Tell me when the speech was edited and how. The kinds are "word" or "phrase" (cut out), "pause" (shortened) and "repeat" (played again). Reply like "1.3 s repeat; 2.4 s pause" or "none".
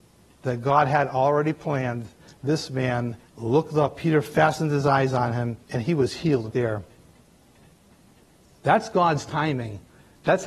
3.3 s pause; 5.6 s pause; 6.5 s word